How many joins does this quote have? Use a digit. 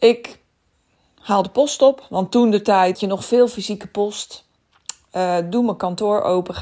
1